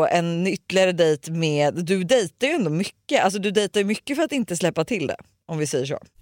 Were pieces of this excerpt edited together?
no; 0 cuts

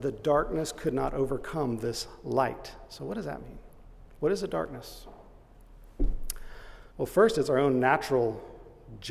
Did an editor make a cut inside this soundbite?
yes; 1 cut; at 6.9 s

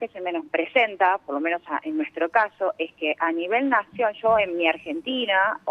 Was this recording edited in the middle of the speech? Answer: no; 0 cuts

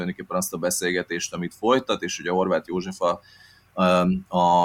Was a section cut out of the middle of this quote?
no; 0 cuts

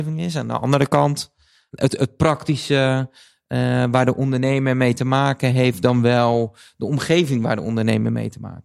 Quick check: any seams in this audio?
no; 0 cuts

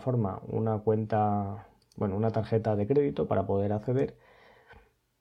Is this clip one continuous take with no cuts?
yes; 0 cuts

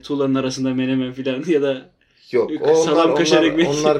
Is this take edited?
no; 0 cuts

